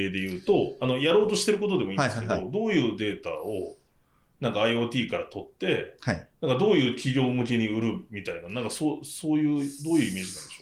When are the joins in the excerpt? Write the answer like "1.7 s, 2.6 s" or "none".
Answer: 6.3 s

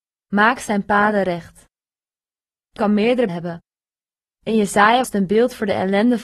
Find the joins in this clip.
2.8 s, 3.3 s, 5.0 s

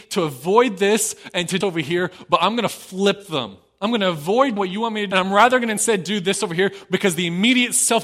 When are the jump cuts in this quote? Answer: 1.6 s, 4.6 s, 5.1 s

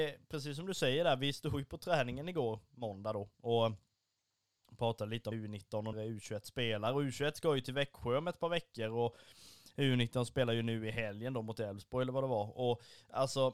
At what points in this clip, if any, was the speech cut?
5.3 s, 5.9 s

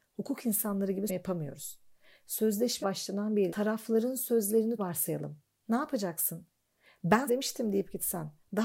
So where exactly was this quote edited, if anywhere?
1.1 s, 2.8 s, 3.5 s, 4.8 s, 7.3 s

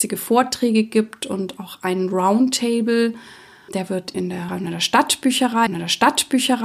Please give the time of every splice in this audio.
3.7 s, 4.1 s, 4.5 s, 5.7 s

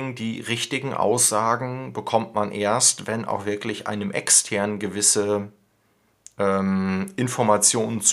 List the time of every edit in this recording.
none

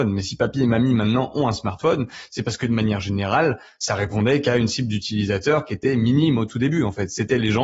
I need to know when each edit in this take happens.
none

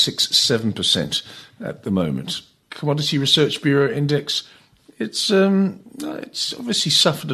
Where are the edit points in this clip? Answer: none

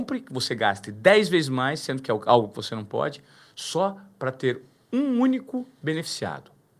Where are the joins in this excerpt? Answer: none

